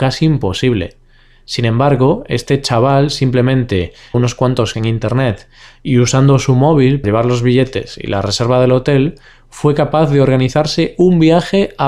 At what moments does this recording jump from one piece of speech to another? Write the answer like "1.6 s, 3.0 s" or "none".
4.1 s, 4.7 s, 7.0 s